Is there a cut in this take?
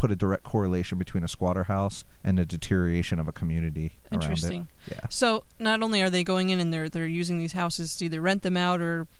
yes; 1 cut; at 2.1 s

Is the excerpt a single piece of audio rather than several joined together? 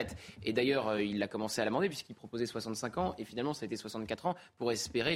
yes; 0 cuts

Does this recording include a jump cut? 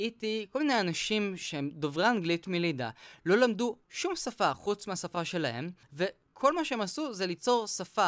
yes; 2 cuts; at 3.8 s, 5.8 s

